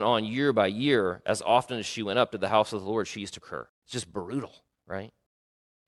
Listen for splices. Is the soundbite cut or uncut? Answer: cut